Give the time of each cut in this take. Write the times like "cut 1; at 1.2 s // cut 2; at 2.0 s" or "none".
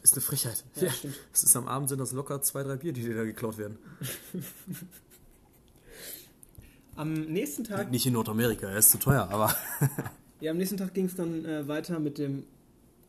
none